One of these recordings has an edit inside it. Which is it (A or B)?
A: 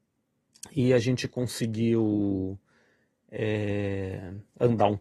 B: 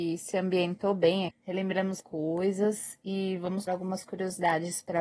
B